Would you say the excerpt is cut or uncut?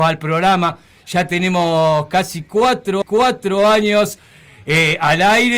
cut